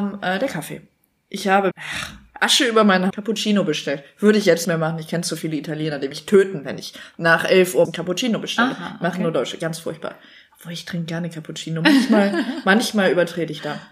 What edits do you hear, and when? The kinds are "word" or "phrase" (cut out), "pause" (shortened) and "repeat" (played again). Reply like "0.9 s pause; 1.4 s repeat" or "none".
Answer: 1.7 s word; 3.1 s word; 4.6 s word; 6.1 s word; 7.8 s word